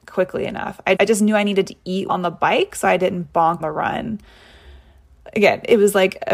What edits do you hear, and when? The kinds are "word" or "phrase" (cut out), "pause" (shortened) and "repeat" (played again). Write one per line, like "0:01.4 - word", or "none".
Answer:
0:01.0 - word
0:02.1 - word
0:03.6 - word